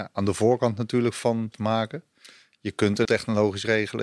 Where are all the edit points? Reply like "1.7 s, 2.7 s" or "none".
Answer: 1.5 s, 3.0 s